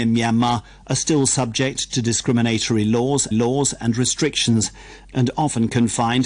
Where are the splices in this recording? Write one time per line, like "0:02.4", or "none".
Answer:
0:03.3